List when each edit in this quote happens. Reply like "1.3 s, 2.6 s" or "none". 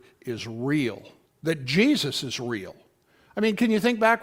1.2 s